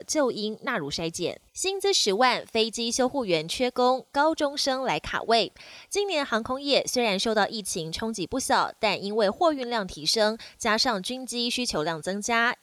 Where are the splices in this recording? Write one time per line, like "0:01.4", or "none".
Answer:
0:01.5